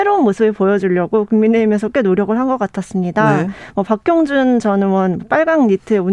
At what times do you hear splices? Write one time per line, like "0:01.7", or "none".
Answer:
none